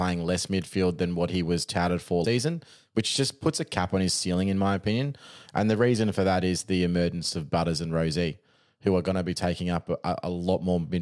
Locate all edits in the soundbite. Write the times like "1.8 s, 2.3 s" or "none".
2.2 s